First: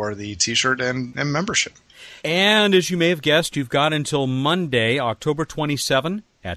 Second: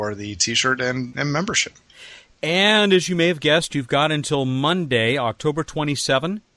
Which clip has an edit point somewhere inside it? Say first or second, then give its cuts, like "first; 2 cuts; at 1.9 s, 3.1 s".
first; 1 cut; at 2.2 s